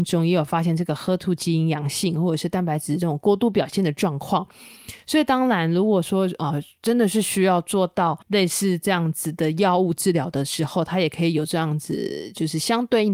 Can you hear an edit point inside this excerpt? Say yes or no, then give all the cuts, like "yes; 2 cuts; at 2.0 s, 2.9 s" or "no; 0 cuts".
yes; 1 cut; at 8.2 s